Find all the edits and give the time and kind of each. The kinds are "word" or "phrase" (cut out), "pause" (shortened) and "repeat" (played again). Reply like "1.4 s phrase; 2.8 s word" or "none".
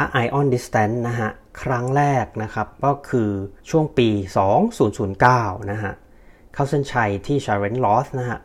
3.6 s pause